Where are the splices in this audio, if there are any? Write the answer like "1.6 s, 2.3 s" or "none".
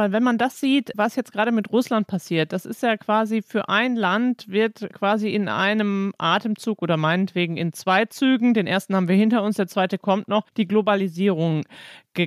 10.5 s